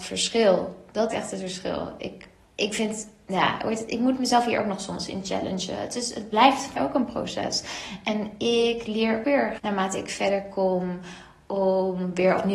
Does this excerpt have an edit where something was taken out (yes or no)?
yes